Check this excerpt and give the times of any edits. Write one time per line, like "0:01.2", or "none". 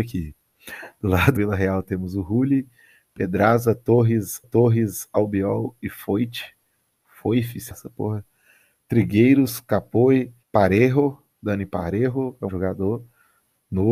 0:01.4
0:04.4
0:07.7
0:10.4
0:12.5